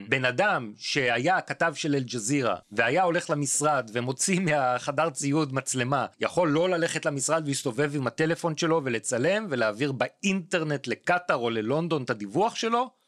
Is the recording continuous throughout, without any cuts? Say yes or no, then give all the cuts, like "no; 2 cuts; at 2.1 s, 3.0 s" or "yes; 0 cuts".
no; 2 cuts; at 2.6 s, 6.1 s